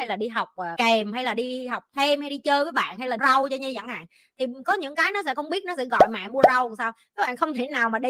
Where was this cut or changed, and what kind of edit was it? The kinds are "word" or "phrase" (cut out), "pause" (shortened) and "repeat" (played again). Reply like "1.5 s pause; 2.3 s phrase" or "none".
3.2 s word